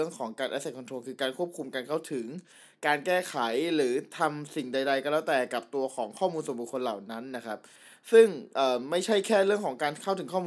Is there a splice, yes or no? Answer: no